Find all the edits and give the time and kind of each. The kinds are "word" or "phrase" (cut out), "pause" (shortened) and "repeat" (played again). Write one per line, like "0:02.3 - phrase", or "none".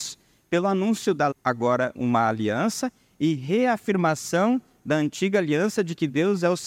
0:01.3 - word
0:01.9 - word